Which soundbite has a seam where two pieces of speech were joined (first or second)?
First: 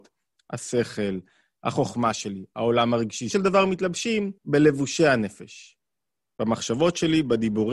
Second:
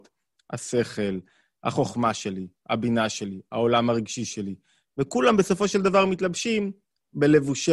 first